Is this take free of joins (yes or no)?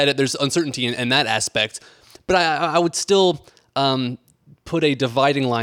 yes